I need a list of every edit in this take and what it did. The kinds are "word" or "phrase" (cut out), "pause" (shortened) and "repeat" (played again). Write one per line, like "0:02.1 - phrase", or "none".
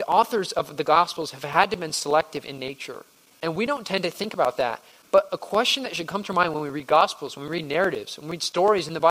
0:03.3 - pause